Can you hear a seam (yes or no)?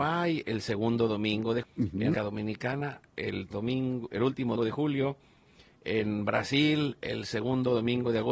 yes